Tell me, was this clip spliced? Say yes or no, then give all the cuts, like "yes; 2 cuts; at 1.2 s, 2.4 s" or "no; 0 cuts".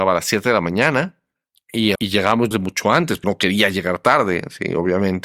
yes; 3 cuts; at 1.9 s, 2.5 s, 3.2 s